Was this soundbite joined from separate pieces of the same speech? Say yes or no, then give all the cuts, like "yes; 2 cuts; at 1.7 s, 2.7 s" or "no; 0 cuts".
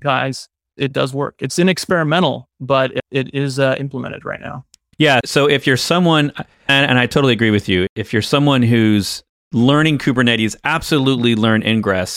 no; 0 cuts